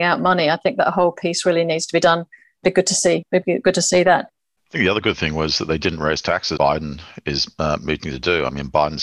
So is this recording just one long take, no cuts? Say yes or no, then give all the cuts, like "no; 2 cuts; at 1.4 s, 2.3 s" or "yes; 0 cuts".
no; 1 cut; at 6.6 s